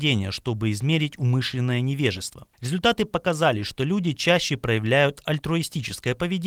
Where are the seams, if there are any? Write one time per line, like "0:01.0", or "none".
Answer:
0:02.5